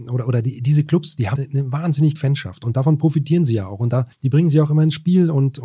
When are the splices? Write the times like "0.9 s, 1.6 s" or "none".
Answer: 1.4 s, 2.2 s, 4.1 s

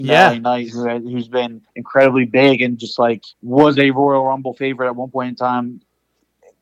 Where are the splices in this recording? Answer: 1.7 s, 3.3 s

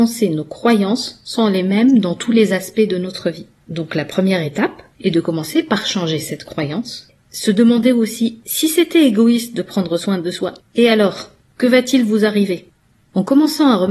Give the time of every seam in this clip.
none

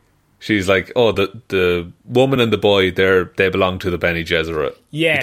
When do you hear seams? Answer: none

